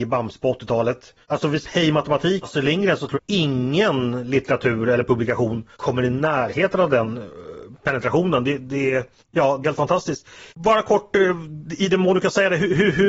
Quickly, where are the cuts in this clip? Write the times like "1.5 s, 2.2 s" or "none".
1.2 s, 1.6 s, 2.4 s, 3.1 s, 5.7 s, 9.2 s, 9.6 s, 10.5 s